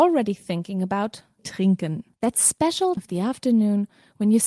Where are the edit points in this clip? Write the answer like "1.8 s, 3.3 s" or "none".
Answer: 1.4 s, 2.1 s, 3.0 s